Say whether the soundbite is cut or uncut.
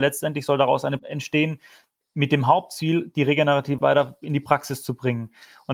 cut